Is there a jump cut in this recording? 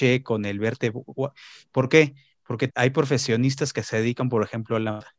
yes; 1 cut; at 2.7 s

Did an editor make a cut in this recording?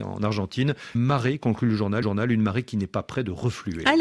yes; 2 cuts; at 0.9 s, 2.0 s

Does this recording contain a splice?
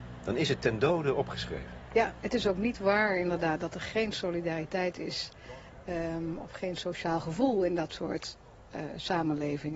no; 0 cuts

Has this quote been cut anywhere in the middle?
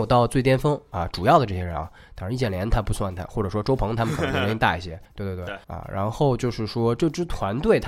yes; 2 cuts; at 5.0 s, 5.6 s

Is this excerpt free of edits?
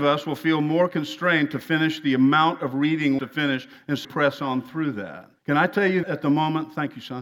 no; 4 cuts; at 3.2 s, 4.0 s, 5.4 s, 6.0 s

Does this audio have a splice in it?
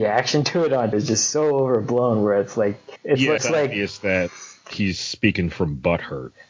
yes; 3 cuts; at 0.9 s, 3.0 s, 3.4 s

